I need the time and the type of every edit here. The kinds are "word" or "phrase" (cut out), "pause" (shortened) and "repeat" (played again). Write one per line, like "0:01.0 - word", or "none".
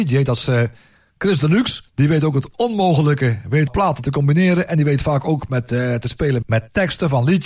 0:01.9 - pause
0:03.7 - phrase
0:06.4 - word